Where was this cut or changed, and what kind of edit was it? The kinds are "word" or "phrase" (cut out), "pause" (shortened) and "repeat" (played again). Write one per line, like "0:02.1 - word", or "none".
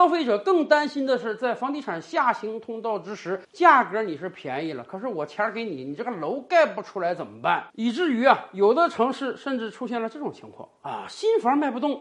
0:03.4 - pause
0:07.7 - pause